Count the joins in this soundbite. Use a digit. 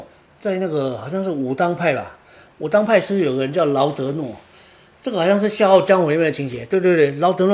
0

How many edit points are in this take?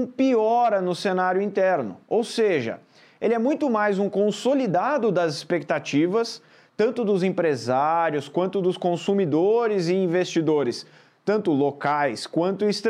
0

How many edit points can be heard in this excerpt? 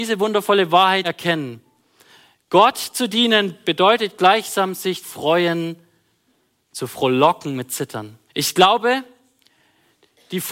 3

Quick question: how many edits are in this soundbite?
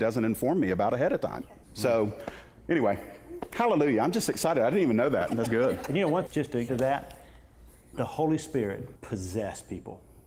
5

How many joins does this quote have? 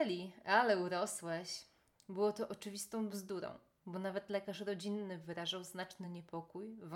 0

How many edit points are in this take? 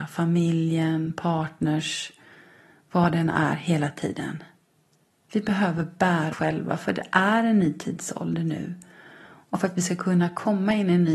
1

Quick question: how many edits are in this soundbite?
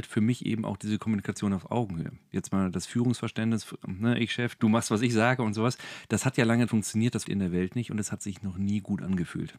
3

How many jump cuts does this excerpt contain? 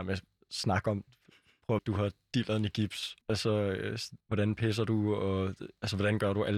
3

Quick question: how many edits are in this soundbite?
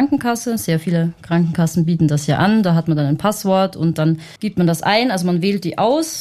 1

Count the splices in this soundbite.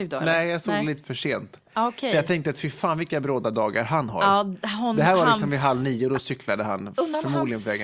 0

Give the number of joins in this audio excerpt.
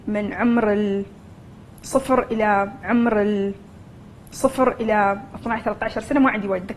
1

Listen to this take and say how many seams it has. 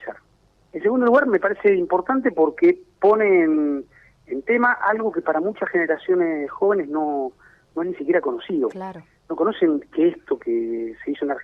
0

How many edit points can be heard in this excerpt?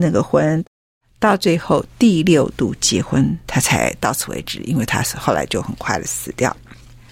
1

